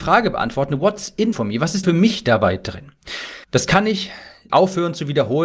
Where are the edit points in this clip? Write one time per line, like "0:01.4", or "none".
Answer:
0:01.3
0:01.8
0:03.4
0:04.5